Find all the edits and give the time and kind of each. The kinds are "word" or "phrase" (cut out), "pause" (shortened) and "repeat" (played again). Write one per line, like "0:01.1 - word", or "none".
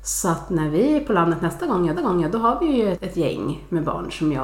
0:01.9 - repeat
0:02.9 - word

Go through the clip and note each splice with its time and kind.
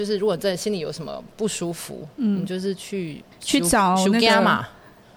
0:03.3 - pause

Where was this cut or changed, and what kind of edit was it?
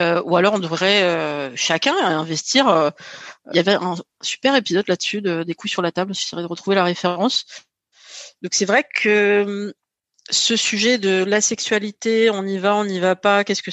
0:03.5 - phrase

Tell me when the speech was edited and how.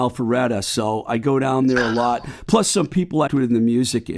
0:03.3 - word

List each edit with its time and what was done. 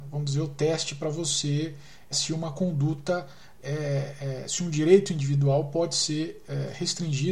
0:02.1 - word

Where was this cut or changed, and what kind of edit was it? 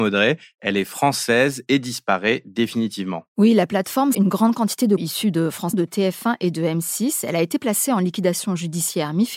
0:03.3 - pause
0:04.1 - phrase
0:05.0 - word
0:05.7 - word

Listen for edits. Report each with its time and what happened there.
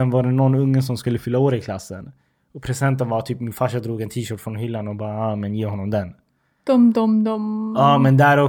none

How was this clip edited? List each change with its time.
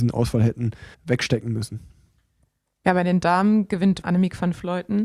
0:00.9 - pause
0:04.0 - word

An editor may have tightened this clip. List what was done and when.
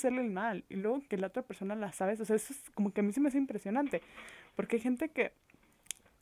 0:01.9 - word

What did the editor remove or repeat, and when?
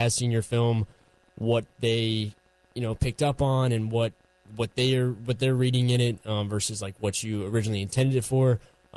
none

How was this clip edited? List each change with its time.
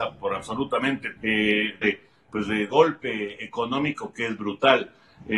0:01.1 - word
0:01.8 - word
0:02.7 - phrase

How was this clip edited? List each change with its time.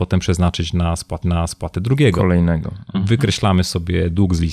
0:01.2 - repeat

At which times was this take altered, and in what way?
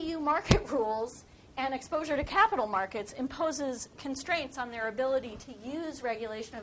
none

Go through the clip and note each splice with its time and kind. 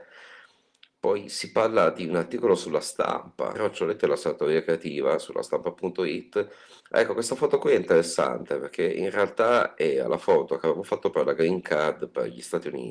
0:03.5 - word
0:06.8 - pause

